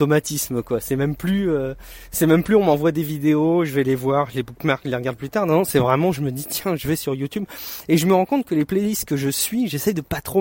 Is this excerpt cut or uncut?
uncut